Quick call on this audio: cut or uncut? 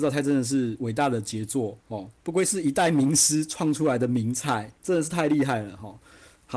cut